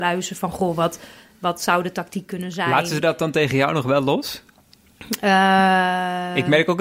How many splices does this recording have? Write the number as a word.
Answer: zero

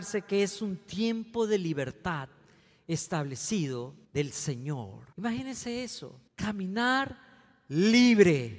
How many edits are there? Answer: three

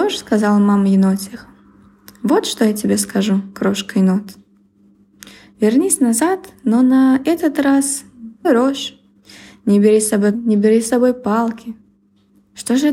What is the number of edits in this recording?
two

